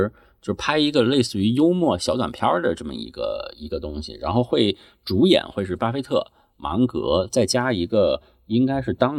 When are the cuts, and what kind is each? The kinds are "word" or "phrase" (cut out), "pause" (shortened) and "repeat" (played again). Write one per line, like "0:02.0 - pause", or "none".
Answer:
none